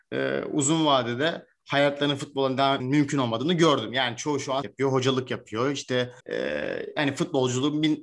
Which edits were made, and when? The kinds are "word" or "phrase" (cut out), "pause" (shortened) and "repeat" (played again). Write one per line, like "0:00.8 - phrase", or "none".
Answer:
0:02.8 - word
0:04.6 - word
0:06.2 - pause